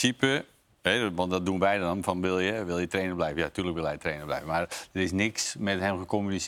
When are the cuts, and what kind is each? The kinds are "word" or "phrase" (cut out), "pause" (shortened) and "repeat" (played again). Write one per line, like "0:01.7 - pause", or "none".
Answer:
none